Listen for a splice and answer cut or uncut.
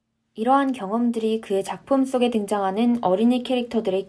uncut